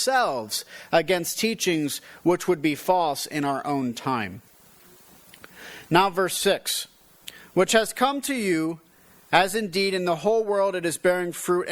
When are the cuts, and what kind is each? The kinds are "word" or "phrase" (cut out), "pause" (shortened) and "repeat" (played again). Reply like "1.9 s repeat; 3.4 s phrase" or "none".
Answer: none